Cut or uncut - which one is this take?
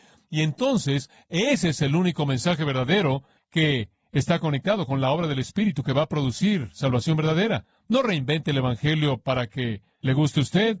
uncut